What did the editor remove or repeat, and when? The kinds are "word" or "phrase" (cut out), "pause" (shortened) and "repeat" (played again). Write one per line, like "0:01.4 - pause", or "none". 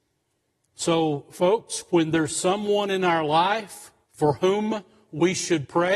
0:04.0 - pause